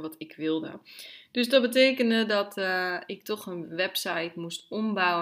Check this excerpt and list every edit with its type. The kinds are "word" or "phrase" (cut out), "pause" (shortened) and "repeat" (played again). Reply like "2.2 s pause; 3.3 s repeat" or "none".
none